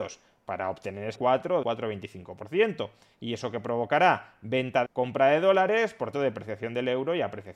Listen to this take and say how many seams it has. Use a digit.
4